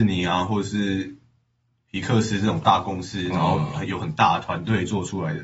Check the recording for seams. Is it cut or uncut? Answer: uncut